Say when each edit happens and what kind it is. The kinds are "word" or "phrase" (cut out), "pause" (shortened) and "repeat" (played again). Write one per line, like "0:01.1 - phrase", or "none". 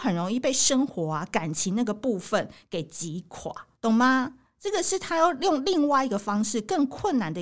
0:03.8 - pause